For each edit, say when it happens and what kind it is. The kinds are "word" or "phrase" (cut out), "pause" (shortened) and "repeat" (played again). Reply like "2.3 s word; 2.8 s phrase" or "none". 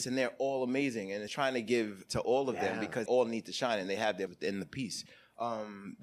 1.3 s word; 2.1 s word; 3.1 s word; 4.3 s word

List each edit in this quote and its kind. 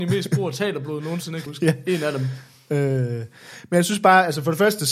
1.5 s word

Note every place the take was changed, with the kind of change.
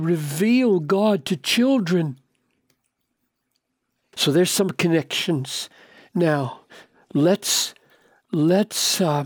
none

